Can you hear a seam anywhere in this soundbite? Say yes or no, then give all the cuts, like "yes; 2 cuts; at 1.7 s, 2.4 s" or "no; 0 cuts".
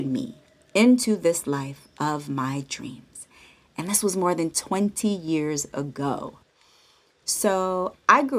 no; 0 cuts